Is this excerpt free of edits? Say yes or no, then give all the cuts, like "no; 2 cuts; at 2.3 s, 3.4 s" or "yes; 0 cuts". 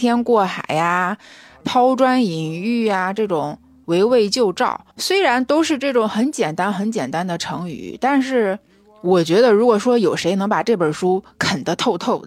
no; 2 cuts; at 1.6 s, 4.9 s